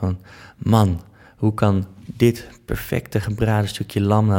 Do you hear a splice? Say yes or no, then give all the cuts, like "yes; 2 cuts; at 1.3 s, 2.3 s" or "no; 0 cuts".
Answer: no; 0 cuts